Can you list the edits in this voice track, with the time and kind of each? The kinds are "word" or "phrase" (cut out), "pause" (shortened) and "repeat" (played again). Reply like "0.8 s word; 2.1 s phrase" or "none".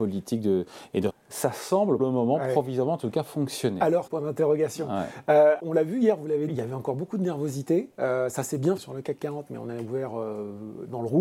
1.1 s word; 2.0 s word; 4.1 s word; 5.6 s word; 6.5 s word; 8.8 s word